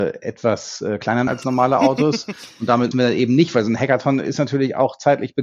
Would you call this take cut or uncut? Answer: cut